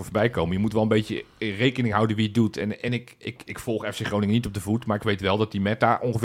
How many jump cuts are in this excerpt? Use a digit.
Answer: 0